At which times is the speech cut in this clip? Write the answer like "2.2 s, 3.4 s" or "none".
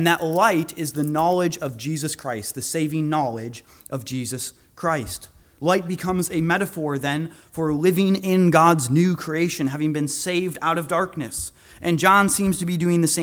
none